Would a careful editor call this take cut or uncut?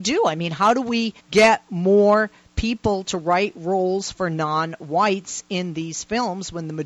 cut